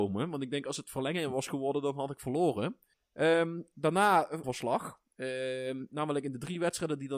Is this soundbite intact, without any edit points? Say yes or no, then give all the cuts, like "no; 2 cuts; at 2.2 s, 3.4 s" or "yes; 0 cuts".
no; 3 cuts; at 2.9 s, 4.4 s, 5.1 s